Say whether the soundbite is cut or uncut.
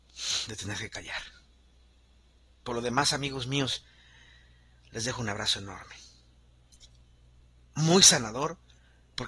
uncut